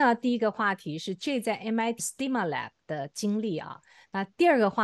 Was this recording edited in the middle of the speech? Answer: yes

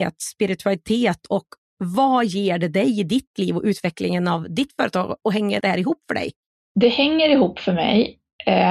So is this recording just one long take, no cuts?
no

